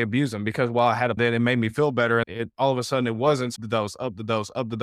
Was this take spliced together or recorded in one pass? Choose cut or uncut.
cut